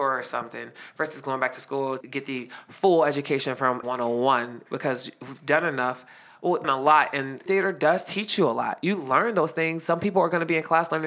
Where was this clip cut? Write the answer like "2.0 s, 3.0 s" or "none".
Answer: 2.0 s, 3.8 s, 6.6 s, 7.5 s